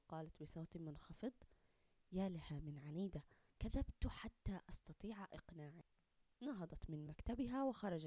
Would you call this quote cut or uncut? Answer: uncut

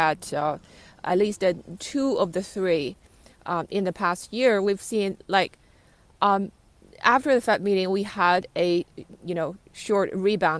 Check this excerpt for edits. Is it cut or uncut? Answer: uncut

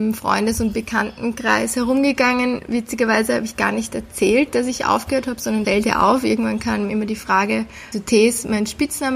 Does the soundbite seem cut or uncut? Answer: cut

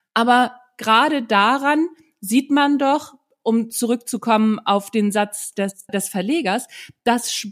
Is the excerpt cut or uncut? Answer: cut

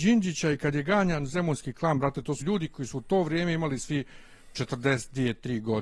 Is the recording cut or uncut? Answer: cut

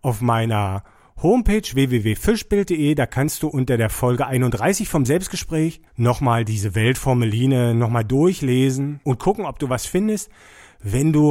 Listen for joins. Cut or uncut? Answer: cut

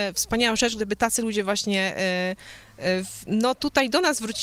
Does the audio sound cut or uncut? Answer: uncut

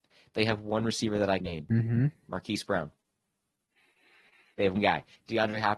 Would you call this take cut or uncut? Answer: cut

